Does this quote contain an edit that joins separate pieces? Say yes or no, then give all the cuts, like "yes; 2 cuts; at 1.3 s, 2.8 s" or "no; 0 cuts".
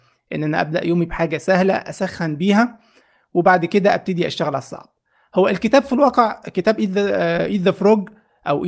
no; 0 cuts